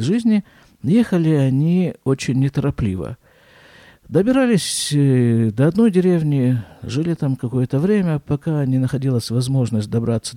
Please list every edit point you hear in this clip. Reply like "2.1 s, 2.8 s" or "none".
none